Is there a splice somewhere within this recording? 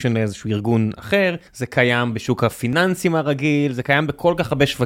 yes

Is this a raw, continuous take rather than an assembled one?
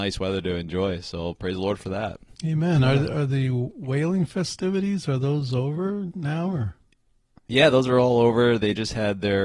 no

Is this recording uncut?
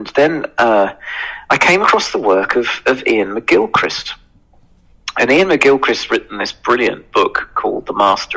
yes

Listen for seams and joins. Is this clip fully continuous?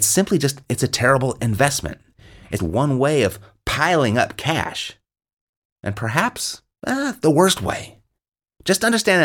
no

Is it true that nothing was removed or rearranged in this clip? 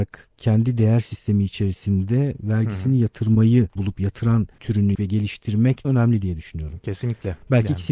no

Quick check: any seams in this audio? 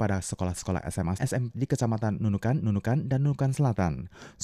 yes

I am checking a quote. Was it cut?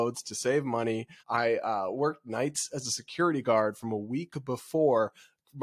yes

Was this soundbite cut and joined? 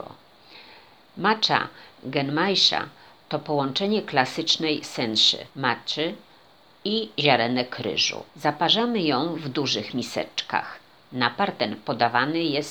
yes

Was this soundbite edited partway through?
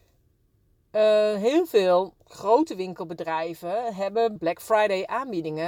yes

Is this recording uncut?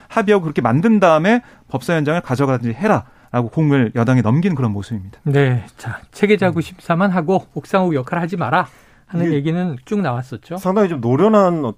yes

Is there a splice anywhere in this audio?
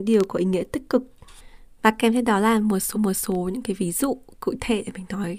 yes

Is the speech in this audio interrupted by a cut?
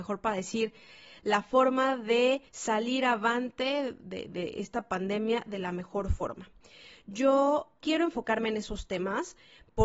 yes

